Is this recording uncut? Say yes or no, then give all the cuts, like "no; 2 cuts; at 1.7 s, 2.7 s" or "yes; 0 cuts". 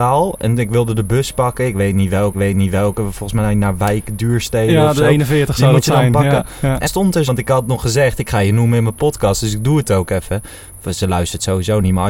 no; 3 cuts; at 2.3 s, 6.9 s, 7.3 s